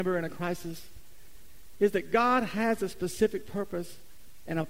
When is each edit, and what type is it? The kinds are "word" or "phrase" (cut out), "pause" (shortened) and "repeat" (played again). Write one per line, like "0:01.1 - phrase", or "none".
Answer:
none